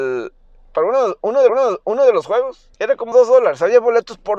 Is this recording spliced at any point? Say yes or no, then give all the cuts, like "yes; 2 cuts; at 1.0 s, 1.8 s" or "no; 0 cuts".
yes; 3 cuts; at 1.5 s, 2.7 s, 3.1 s